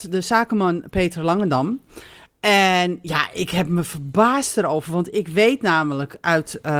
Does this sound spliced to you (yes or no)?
no